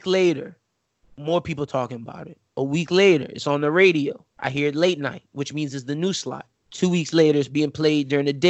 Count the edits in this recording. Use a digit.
3